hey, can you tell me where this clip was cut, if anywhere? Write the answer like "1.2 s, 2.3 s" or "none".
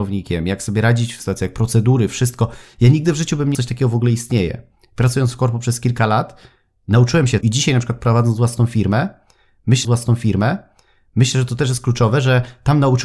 1.2 s, 3.5 s, 7.4 s, 9.8 s